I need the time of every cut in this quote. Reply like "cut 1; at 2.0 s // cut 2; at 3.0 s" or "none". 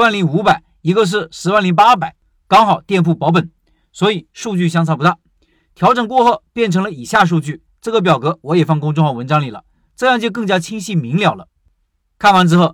none